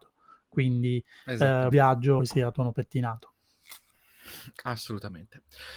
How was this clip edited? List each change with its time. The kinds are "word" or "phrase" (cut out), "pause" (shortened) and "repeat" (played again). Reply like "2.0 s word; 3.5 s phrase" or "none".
1.7 s word; 2.2 s word